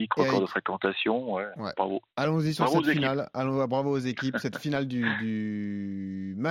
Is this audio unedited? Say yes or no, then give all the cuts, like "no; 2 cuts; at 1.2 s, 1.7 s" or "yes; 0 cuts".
no; 1 cut; at 2.1 s